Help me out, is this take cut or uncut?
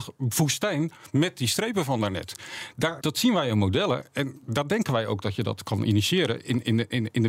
cut